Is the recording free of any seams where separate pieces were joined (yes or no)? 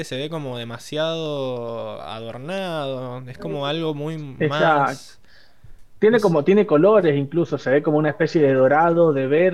yes